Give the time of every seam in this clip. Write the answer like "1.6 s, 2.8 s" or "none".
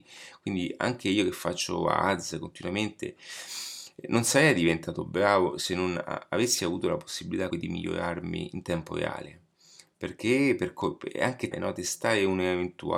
7.5 s, 11.5 s